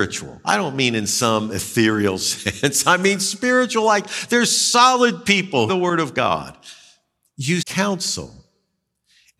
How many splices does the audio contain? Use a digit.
2